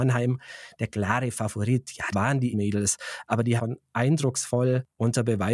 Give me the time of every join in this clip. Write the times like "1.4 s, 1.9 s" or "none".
2.1 s, 2.5 s, 3.6 s